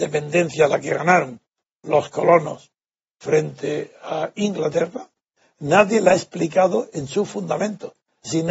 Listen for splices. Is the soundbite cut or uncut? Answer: uncut